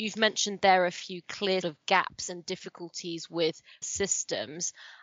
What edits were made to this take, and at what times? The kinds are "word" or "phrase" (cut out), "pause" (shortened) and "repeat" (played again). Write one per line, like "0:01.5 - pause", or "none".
0:01.6 - word
0:03.8 - word